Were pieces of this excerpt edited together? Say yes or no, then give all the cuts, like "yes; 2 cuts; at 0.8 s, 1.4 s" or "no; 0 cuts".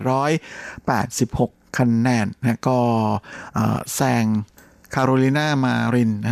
no; 0 cuts